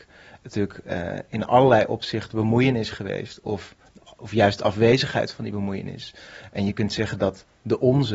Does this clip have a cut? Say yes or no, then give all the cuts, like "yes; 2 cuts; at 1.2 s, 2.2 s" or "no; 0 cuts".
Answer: no; 0 cuts